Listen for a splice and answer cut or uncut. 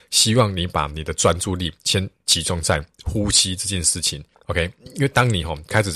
cut